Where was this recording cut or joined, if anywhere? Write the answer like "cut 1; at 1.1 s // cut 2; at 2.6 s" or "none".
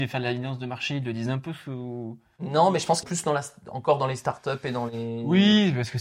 cut 1; at 3.0 s